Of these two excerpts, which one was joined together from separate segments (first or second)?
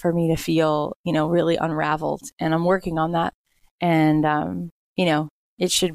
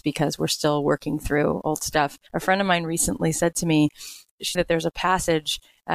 second